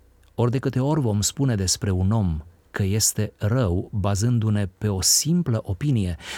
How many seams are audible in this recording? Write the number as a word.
zero